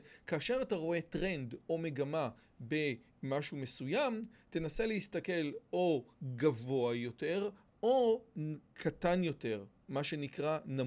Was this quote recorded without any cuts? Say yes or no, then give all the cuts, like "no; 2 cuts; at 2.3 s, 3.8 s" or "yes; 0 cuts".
yes; 0 cuts